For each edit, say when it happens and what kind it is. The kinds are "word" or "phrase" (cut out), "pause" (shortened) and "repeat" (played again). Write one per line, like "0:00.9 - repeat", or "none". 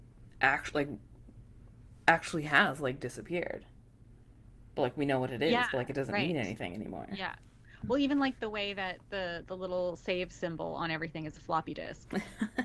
none